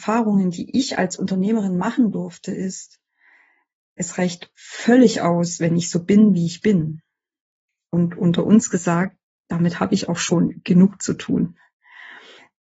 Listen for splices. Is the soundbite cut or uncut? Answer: uncut